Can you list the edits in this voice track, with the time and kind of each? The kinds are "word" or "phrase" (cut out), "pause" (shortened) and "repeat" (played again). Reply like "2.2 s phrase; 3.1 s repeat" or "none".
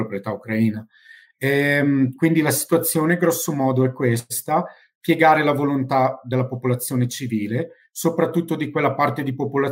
none